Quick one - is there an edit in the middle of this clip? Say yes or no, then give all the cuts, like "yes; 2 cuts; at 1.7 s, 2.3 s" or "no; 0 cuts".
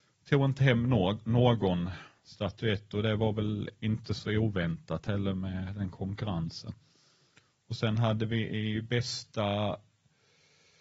no; 0 cuts